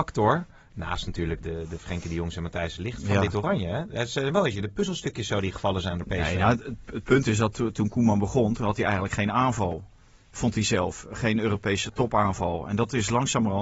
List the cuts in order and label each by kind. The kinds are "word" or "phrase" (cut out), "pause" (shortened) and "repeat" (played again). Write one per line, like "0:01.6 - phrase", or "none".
0:01.4 - word

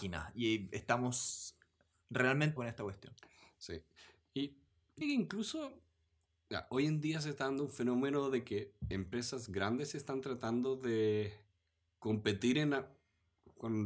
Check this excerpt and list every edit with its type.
0:02.6 - word
0:05.0 - word

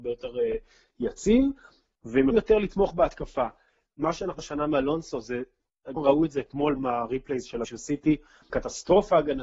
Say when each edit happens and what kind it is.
0:02.3 - word
0:04.4 - word
0:06.0 - word
0:06.8 - word
0:07.6 - word
0:08.5 - word

